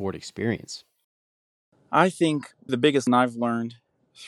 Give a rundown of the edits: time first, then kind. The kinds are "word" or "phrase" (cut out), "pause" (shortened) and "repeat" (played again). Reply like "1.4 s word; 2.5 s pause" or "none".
2.7 s word; 3.1 s word

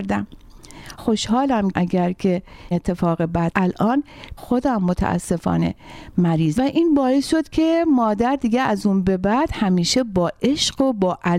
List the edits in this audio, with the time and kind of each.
1.0 s word; 1.7 s phrase; 2.7 s word; 3.5 s word; 4.4 s word; 6.6 s phrase

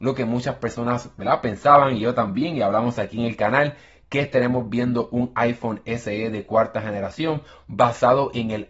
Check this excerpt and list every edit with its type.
none

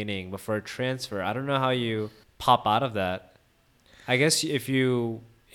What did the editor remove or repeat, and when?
2.2 s pause

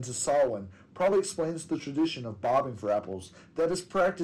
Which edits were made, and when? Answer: none

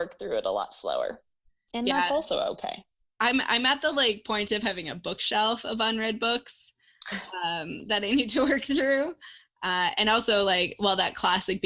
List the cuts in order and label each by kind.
none

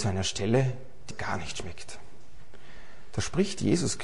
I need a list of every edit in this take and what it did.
1.1 s word

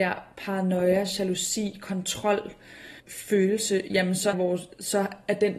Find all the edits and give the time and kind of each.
3.0 s pause; 4.3 s word

